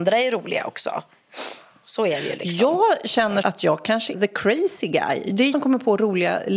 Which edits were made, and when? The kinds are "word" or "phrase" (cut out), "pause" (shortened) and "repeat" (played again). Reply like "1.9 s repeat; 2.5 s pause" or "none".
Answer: 3.4 s word; 4.1 s word; 5.5 s word